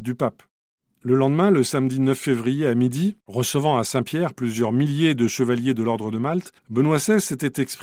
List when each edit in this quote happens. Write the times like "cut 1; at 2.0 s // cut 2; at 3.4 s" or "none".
cut 1; at 3.2 s // cut 2; at 6.6 s